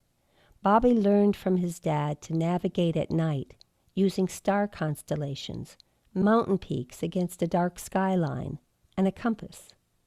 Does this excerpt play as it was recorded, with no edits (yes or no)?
yes